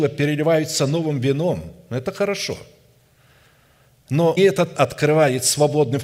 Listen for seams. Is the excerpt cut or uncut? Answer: cut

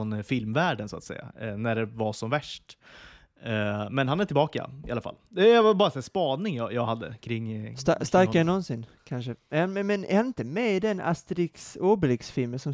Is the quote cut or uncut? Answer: uncut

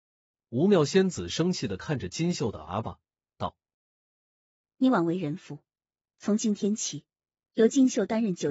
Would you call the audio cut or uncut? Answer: uncut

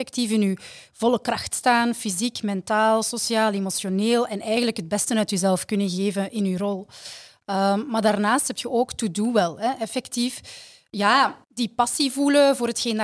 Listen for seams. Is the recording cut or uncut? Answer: cut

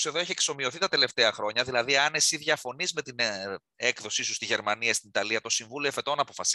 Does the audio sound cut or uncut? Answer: uncut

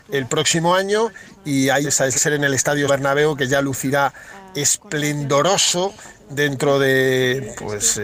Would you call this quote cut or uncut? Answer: cut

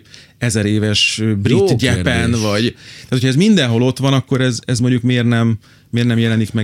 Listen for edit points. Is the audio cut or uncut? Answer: uncut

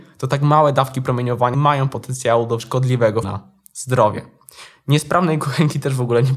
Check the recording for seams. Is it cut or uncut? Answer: cut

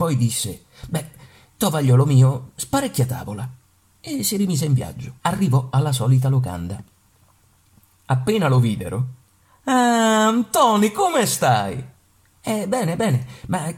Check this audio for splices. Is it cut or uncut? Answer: cut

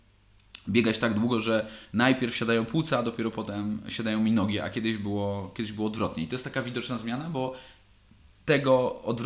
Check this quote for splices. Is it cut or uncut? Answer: uncut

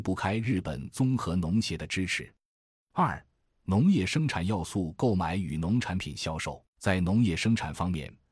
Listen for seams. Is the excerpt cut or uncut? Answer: cut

